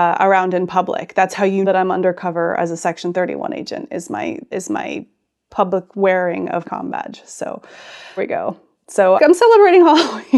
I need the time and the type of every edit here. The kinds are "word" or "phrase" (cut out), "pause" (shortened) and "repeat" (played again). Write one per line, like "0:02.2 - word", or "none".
0:01.6 - word
0:04.5 - word
0:06.6 - word
0:08.2 - word
0:09.2 - word